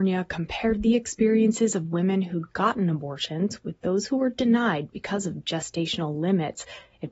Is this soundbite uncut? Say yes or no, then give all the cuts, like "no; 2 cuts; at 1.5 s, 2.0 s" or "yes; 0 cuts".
yes; 0 cuts